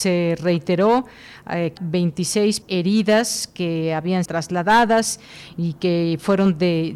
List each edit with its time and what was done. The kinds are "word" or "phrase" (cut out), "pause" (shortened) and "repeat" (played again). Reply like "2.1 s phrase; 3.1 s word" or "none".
1.8 s word; 2.6 s word; 4.3 s phrase

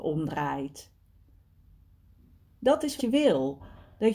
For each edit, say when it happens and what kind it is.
3.0 s word

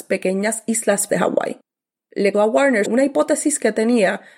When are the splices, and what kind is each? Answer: 1.1 s word; 2.3 s word; 2.8 s word

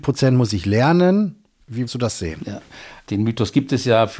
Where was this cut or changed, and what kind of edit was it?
1.9 s word

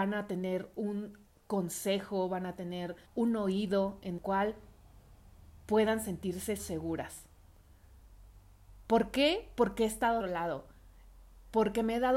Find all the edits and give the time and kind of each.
1.3 s pause; 3.0 s pause; 4.2 s word; 6.6 s word; 10.2 s phrase

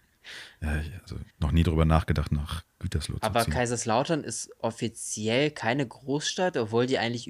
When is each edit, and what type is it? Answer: 1.3 s pause

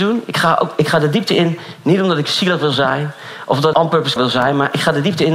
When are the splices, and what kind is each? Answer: 3.7 s word; 4.2 s word

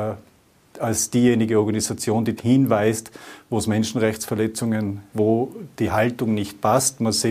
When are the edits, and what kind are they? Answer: 2.4 s word; 5.1 s word

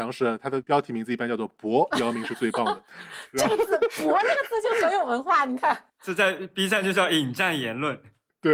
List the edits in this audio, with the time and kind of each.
2.9 s pause

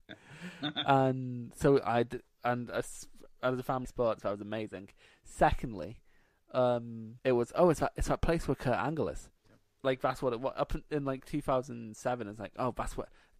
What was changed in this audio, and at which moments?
3.8 s phrase; 7.2 s pause; 9.4 s pause

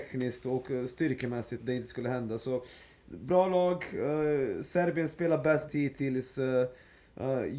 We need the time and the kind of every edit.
1.6 s word; 5.7 s word

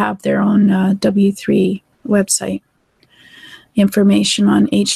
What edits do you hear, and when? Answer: 1.9 s pause

